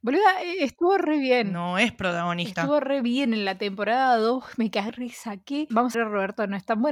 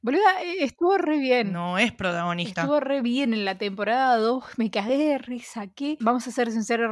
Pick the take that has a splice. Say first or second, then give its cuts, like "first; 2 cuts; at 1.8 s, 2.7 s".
first; 2 cuts; at 4.9 s, 5.9 s